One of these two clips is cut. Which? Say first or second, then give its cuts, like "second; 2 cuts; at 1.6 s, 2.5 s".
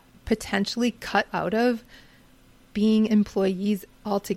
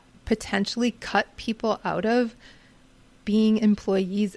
first; 1 cut; at 1.3 s